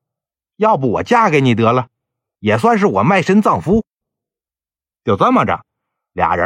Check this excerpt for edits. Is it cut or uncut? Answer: uncut